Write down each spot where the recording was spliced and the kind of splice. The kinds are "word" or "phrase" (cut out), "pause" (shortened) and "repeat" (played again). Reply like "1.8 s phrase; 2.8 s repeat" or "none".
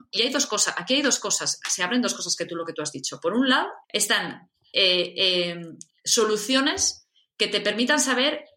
3.8 s pause